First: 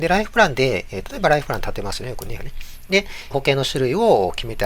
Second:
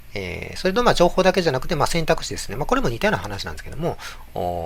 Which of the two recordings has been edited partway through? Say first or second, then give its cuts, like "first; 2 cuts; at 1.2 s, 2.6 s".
first; 2 cuts; at 2.4 s, 3.3 s